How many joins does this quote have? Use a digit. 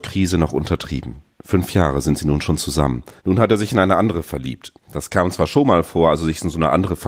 3